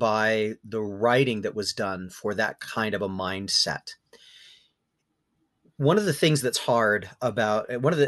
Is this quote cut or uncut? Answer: uncut